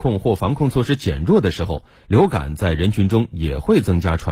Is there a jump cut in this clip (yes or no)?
no